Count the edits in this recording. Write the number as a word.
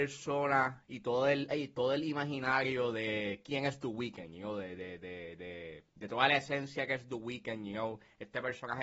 zero